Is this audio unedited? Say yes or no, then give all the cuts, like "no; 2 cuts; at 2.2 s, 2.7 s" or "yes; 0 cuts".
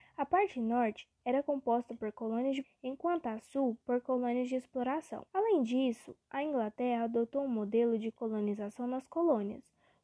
no; 3 cuts; at 1.1 s, 2.6 s, 5.3 s